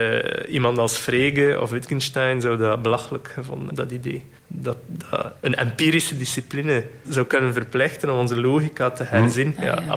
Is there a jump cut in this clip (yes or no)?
yes